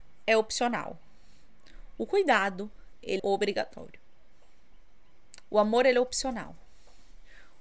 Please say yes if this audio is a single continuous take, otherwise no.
no